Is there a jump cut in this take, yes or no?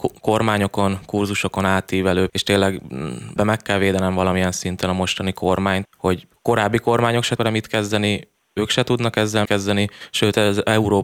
yes